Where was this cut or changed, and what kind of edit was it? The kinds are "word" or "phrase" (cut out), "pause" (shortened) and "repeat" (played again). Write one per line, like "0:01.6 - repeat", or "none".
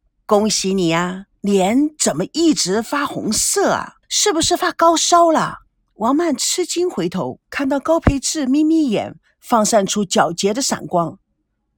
0:01.3 - pause
0:04.0 - pause
0:05.7 - pause
0:07.4 - pause